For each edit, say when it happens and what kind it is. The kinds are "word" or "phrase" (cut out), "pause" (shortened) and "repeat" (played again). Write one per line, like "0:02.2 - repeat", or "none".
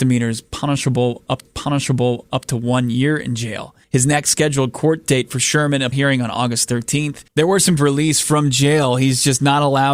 0:01.5 - repeat
0:03.8 - pause
0:05.9 - word
0:07.3 - pause
0:07.8 - phrase